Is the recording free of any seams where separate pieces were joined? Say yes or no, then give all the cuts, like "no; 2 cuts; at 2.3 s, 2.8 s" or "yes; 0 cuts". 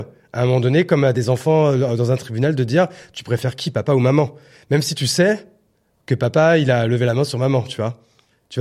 yes; 0 cuts